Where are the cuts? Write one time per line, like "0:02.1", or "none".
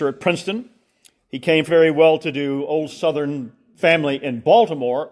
0:01.7